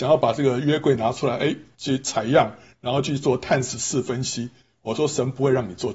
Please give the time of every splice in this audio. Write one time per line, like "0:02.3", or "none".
none